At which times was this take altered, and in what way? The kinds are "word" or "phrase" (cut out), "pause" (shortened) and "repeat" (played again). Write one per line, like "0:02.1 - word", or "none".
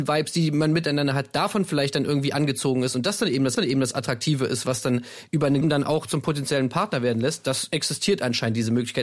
0:03.6 - repeat
0:05.6 - phrase